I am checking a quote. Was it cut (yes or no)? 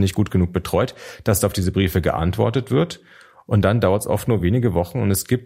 no